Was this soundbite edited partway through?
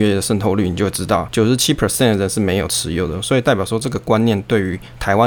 no; 0 cuts

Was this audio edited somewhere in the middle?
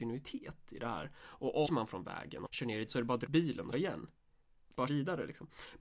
yes; 6 cuts; at 1.7 s, 2.5 s, 2.9 s, 3.3 s, 3.7 s, 4.9 s

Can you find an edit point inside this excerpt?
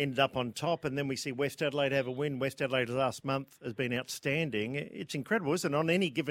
no; 0 cuts

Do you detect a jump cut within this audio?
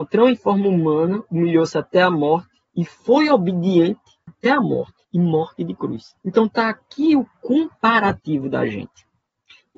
yes; 3 cuts; at 2.7 s, 5.0 s, 6.2 s

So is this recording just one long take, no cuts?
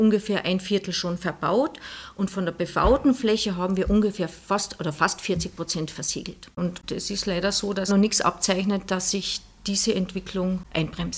no; 1 cut; at 7.9 s

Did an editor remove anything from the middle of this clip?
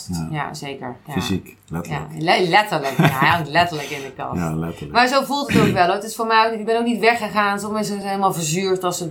no; 0 cuts

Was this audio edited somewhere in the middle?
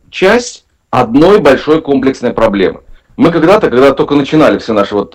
yes; 1 cut; at 3.0 s

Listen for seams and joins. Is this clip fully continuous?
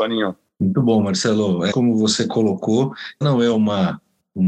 no; 2 cuts; at 1.7 s, 3.2 s

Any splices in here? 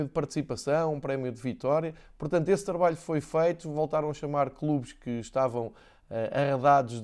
no; 0 cuts

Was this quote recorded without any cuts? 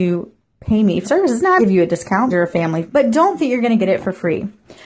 no; 5 cuts; at 1.0 s, 1.6 s, 2.3 s, 2.9 s, 3.4 s

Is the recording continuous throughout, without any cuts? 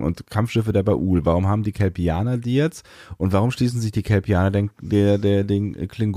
yes; 0 cuts

